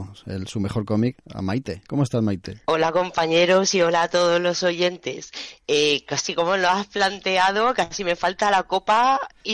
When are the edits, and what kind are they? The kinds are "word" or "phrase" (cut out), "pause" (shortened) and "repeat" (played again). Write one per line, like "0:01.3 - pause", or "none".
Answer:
0:02.6 - pause

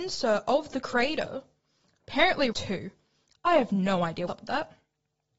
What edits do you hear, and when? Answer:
0:02.5 - phrase
0:04.3 - word

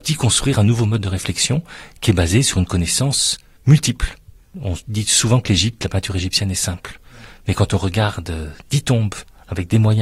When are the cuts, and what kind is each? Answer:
none

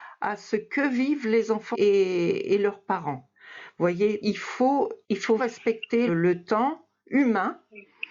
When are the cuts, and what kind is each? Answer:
0:01.7 - word
0:04.2 - word
0:05.0 - pause
0:05.4 - word
0:06.1 - word

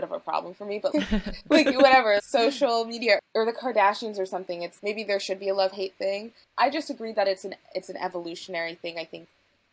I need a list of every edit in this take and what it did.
0:00.9 - word
0:02.2 - word
0:04.8 - word

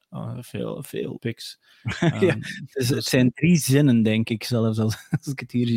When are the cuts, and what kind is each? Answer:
0:01.2 - phrase

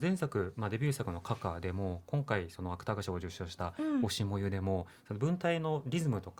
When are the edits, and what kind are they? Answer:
none

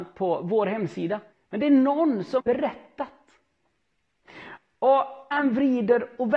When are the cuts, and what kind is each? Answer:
0:01.3 - pause
0:02.4 - word
0:05.3 - phrase

